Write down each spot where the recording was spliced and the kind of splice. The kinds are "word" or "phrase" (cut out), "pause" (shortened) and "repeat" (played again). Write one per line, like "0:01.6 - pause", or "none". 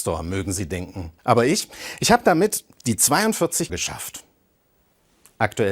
0:01.2 - pause
0:03.7 - word